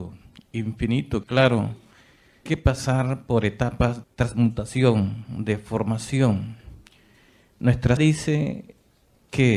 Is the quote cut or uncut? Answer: cut